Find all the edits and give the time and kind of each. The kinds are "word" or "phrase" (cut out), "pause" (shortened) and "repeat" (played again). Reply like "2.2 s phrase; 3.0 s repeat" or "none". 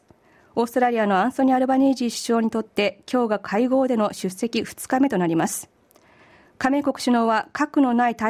none